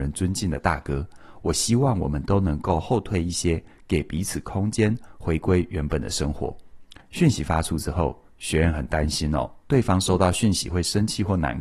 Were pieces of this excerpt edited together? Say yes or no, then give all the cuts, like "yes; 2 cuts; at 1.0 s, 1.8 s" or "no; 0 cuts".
yes; 1 cut; at 7.0 s